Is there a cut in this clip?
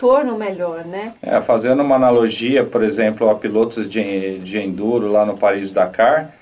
no; 0 cuts

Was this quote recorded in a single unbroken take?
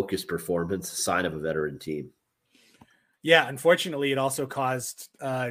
yes; 0 cuts

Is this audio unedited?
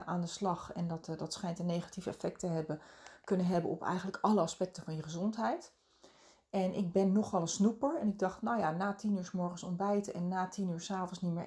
yes; 0 cuts

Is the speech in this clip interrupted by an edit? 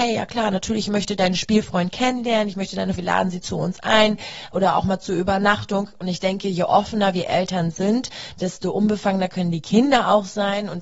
yes; 1 cut; at 3.0 s

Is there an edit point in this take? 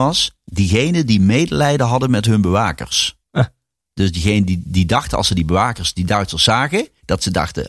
yes; 1 cut; at 3.2 s

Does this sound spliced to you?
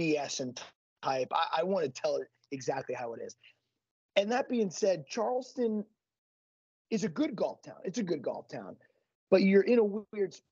yes; 1 cut; at 8.1 s

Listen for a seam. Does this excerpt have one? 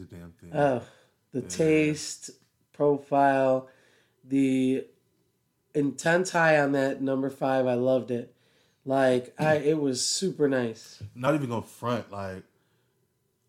no; 0 cuts

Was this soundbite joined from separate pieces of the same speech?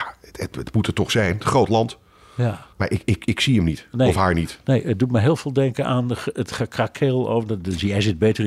yes; 1 cut; at 2.7 s

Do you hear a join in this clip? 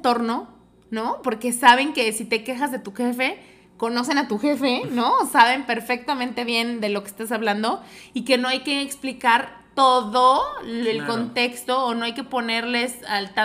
no; 0 cuts

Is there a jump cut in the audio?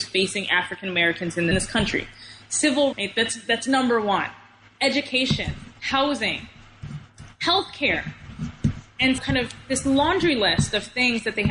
yes; 4 cuts; at 1.5 s, 2.9 s, 5.8 s, 9.2 s

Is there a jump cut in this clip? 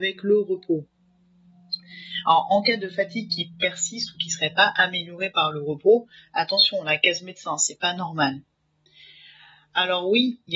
no; 0 cuts

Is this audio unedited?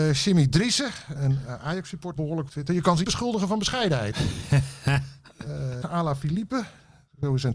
no; 5 cuts; at 1.2 s, 2.2 s, 2.5 s, 3.0 s, 5.8 s

